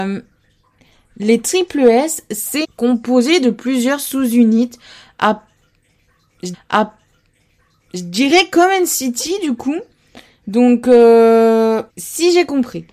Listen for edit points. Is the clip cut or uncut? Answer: cut